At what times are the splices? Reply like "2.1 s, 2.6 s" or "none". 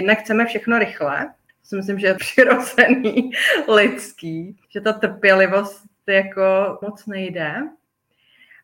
1.5 s, 2.2 s, 4.6 s, 6.8 s